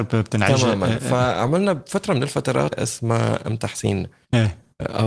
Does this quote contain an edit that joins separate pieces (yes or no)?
yes